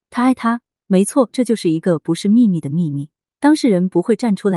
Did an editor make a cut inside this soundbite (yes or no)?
no